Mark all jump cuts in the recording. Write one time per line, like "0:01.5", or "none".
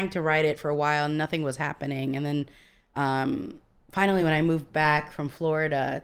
none